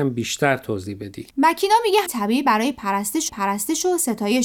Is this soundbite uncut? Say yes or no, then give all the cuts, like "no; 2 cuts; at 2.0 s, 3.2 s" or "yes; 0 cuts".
no; 3 cuts; at 1.3 s, 2.1 s, 3.3 s